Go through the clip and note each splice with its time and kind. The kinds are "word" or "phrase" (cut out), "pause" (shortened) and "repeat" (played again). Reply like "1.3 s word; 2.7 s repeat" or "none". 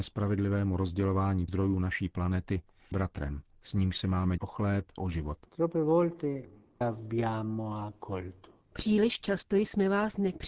1.5 s word; 2.9 s word; 4.4 s word; 5.0 s phrase; 5.5 s pause; 6.8 s phrase